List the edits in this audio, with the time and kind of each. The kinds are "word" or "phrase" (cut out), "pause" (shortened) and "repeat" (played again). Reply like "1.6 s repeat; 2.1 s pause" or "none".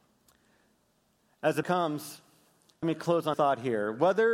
1.6 s word; 2.8 s word; 3.3 s word

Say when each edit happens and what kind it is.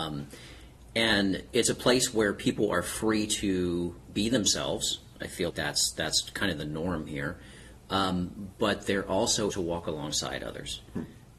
5.5 s word; 9.5 s word

